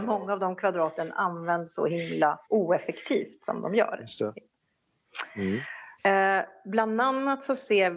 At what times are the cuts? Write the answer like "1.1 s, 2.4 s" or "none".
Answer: 2.4 s, 6.0 s